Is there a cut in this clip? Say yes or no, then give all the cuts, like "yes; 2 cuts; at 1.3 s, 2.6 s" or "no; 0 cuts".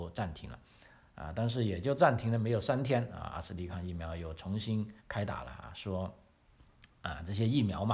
yes; 1 cut; at 5.0 s